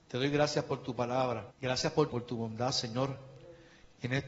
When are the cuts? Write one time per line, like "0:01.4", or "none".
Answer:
0:01.5
0:02.1